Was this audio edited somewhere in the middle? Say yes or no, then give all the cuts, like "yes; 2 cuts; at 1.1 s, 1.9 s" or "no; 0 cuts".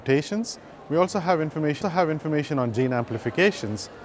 yes; 1 cut; at 1.8 s